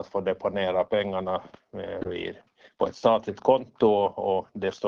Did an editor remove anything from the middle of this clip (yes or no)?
no